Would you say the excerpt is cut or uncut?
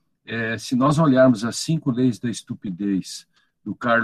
uncut